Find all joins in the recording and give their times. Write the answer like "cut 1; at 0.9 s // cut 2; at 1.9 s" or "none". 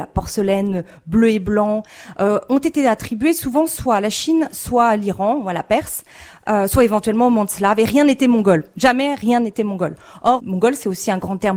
cut 1; at 10.4 s